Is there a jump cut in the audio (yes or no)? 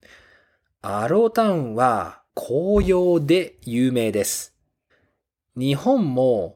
yes